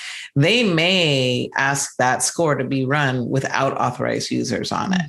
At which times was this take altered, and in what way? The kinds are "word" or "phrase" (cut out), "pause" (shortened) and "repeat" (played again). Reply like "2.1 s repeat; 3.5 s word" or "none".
none